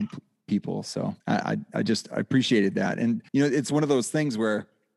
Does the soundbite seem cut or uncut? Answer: cut